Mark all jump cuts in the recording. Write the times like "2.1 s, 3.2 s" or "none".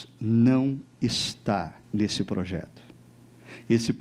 1.8 s